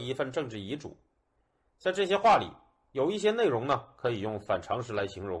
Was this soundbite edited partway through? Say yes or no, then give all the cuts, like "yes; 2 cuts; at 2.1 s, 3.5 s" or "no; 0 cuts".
no; 0 cuts